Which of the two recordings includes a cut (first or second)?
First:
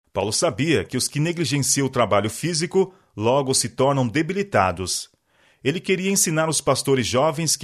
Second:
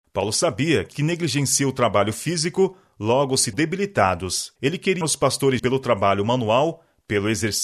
second